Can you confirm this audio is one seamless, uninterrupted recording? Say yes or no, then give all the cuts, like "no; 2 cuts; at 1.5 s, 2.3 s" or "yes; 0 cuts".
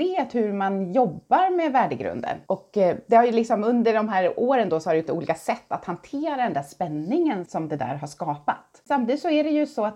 no; 2 cuts; at 5.1 s, 7.5 s